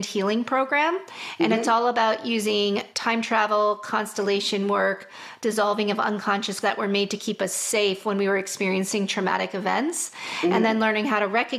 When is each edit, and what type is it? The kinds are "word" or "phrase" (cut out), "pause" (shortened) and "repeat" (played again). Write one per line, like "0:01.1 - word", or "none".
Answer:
0:06.6 - word

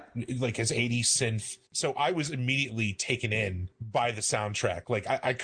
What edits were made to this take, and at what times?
0:01.7 - pause

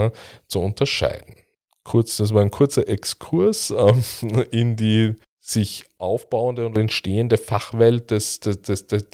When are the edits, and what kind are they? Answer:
0:05.2 - pause

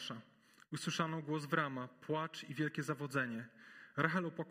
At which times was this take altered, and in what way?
none

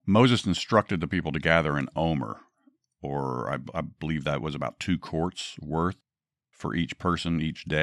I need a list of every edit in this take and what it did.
none

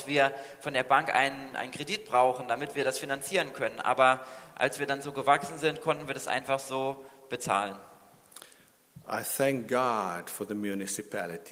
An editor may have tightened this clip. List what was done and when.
none

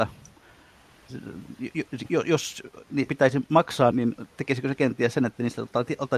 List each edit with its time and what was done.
0:03.1 - word
0:03.9 - word

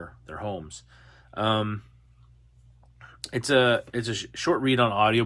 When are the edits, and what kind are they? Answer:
none

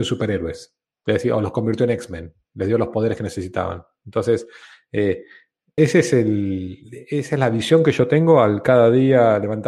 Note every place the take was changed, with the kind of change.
0:05.8 - word

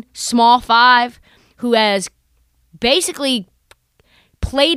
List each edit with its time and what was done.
none

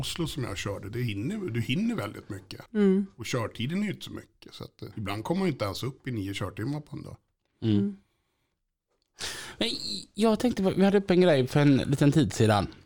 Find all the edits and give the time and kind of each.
0:02.7 - pause
0:04.9 - pause

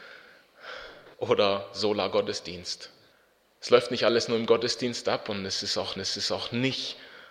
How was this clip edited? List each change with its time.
0:01.1 - pause
0:03.1 - pause
0:06.0 - repeat

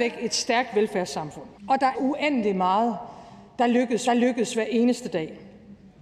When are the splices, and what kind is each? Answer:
0:01.6 - pause
0:01.9 - phrase
0:04.1 - repeat

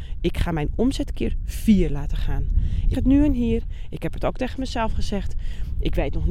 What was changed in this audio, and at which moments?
0:02.9 - word

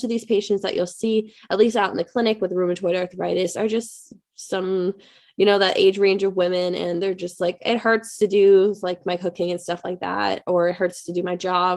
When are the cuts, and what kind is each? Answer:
none

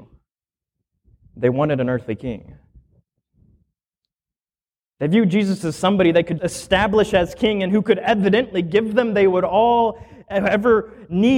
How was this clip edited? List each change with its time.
0:06.4 - word

